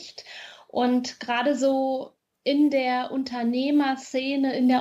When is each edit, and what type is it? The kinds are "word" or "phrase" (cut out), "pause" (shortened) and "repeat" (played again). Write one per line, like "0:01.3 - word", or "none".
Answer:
none